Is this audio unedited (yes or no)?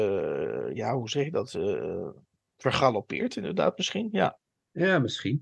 yes